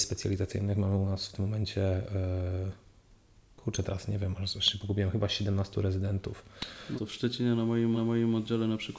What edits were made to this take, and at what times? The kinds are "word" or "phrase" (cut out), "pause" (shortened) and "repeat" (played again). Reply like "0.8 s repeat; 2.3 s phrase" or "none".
7.0 s word; 7.9 s repeat